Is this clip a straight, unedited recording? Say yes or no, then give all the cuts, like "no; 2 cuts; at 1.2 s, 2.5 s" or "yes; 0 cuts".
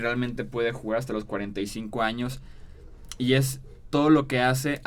yes; 0 cuts